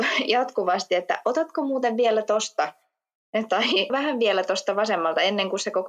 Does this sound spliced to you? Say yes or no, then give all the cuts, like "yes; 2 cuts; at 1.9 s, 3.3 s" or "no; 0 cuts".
yes; 1 cut; at 3.9 s